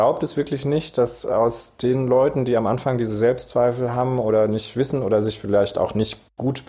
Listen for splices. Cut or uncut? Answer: uncut